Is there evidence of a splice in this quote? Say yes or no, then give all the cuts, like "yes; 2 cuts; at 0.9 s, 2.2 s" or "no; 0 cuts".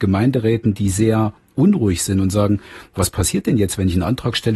no; 0 cuts